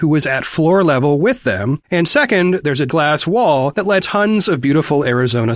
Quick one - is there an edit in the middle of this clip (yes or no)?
yes